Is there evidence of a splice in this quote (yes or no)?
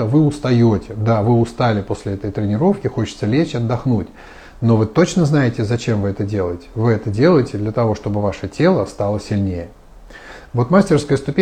no